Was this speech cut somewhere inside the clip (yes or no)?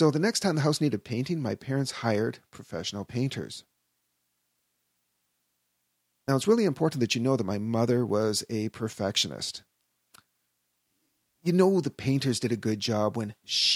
no